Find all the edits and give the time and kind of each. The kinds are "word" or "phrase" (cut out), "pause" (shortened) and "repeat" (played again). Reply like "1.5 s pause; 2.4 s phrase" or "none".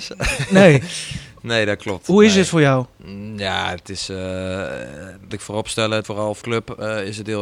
5.3 s word; 6.0 s word; 6.4 s word